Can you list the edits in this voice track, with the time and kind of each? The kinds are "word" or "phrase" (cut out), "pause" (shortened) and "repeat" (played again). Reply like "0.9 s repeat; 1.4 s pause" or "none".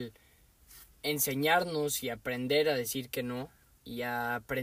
0.9 s pause